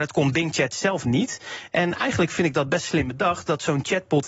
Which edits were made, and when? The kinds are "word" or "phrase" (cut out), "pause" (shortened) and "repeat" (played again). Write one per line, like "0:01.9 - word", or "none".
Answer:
none